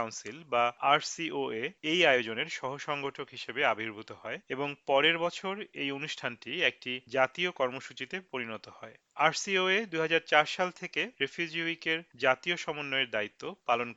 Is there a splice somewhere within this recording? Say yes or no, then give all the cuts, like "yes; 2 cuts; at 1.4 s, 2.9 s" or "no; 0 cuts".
no; 0 cuts